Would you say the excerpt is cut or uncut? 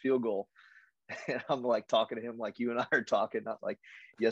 uncut